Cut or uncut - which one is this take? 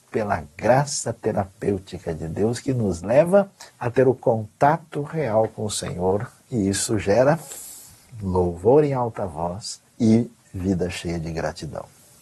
cut